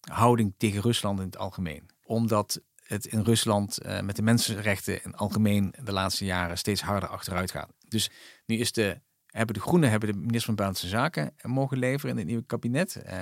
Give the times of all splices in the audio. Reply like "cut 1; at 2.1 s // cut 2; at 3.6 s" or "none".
none